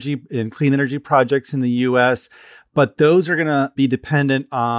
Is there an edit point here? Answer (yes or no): no